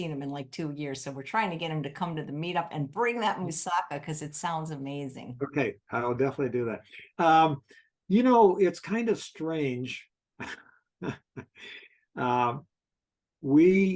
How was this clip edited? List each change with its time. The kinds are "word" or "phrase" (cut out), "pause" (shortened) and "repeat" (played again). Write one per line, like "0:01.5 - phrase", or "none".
none